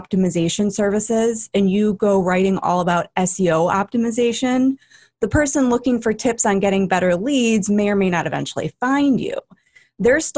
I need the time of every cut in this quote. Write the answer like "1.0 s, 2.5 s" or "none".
none